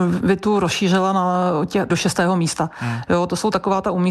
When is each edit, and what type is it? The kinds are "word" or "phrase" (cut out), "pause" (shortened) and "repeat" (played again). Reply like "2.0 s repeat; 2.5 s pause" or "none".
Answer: 1.9 s word